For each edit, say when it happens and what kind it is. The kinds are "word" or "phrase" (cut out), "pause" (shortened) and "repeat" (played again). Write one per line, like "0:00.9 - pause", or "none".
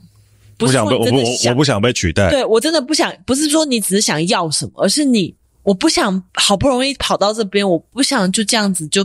0:06.3 - pause